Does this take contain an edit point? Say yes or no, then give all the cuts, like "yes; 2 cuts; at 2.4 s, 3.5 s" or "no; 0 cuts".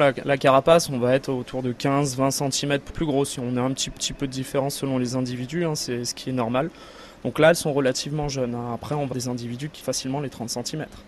yes; 4 cuts; at 2.9 s, 4.0 s, 9.1 s, 9.8 s